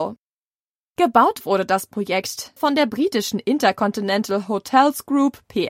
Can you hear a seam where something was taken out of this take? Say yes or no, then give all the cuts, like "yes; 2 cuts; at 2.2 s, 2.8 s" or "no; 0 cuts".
yes; 1 cut; at 2.6 s